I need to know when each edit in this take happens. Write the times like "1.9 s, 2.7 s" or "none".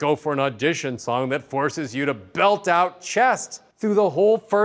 3.7 s

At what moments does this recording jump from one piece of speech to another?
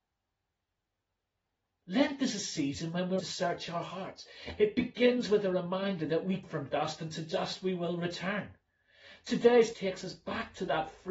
3.2 s, 6.4 s, 9.7 s

